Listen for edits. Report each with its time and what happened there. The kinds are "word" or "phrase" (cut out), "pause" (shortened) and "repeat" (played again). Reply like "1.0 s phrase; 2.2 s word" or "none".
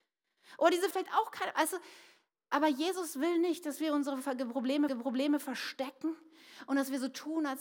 0.9 s phrase; 4.9 s repeat